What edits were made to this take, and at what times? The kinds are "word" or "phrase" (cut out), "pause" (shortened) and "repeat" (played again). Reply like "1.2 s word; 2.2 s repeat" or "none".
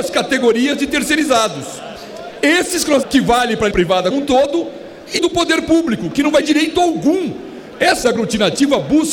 3.0 s word; 3.7 s word; 4.1 s word; 5.2 s word; 6.4 s word; 8.0 s word